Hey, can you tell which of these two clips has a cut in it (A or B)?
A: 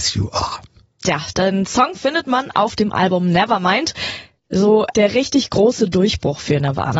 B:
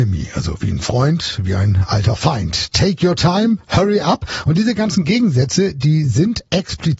A